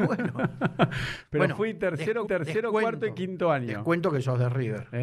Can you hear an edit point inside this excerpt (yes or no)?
yes